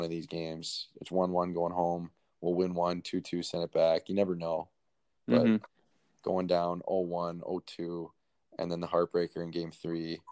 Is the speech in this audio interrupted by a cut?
no; 0 cuts

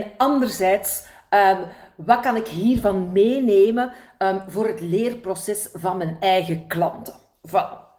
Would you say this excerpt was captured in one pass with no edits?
yes; 0 cuts

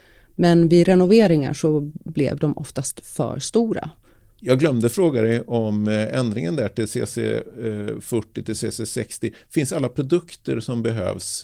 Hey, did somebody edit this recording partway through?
no; 0 cuts

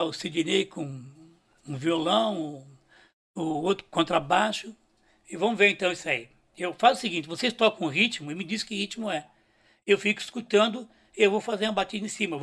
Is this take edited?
no; 0 cuts

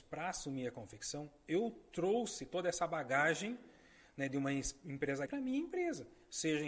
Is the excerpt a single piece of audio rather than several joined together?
no; 1 cut; at 5.3 s

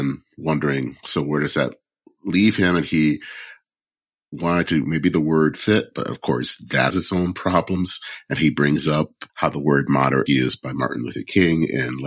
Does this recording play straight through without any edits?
no; 5 cuts; at 4.8 s, 5.5 s, 6.9 s, 9.3 s, 10.3 s

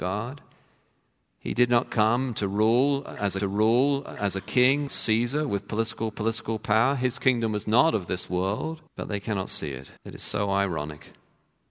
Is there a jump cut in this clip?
yes; 5 cuts; at 3.4 s, 4.9 s, 6.1 s, 8.9 s, 10.0 s

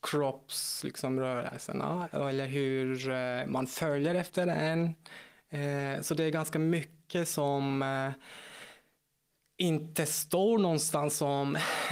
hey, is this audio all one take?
yes; 0 cuts

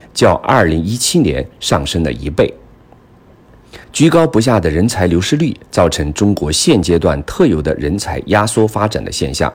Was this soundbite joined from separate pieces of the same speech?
yes; 1 cut; at 3.8 s

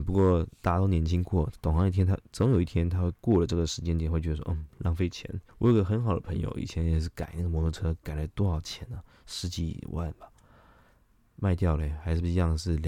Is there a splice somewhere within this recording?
yes; 1 cut; at 5.5 s

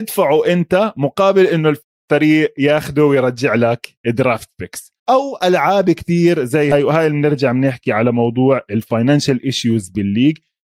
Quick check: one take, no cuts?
no; 2 cuts; at 4.0 s, 5.0 s

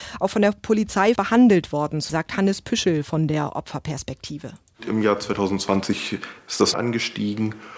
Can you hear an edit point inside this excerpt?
yes; 3 cuts; at 1.2 s, 2.1 s, 6.7 s

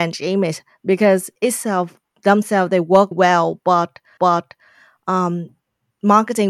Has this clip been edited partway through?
yes; 4 cuts; at 1.4 s, 2.1 s, 3.1 s, 4.2 s

